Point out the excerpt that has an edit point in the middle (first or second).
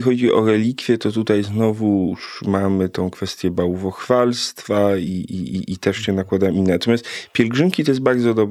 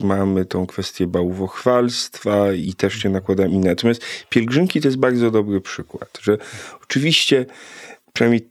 second